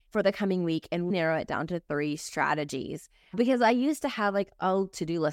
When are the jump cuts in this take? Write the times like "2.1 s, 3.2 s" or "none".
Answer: 1.1 s